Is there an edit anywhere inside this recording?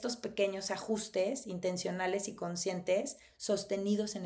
no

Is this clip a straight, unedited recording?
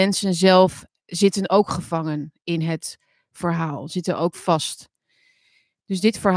yes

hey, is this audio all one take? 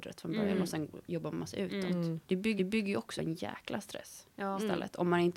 no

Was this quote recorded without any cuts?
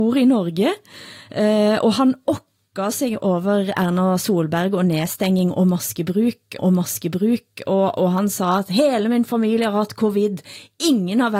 no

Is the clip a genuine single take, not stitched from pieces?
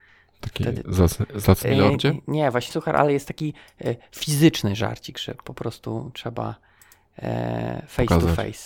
no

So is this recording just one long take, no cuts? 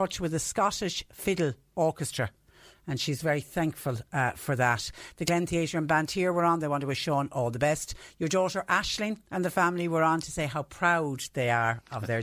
yes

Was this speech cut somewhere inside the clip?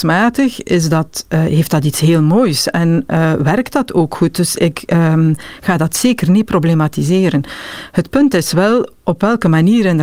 no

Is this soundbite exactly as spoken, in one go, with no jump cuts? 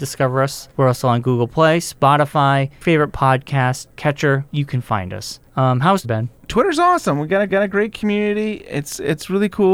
no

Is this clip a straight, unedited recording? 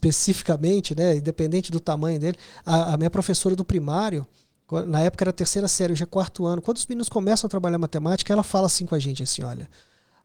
yes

